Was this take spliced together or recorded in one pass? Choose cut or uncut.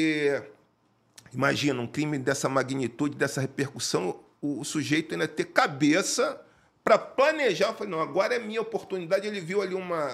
uncut